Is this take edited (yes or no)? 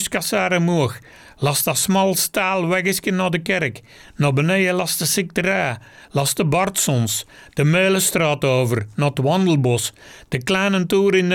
no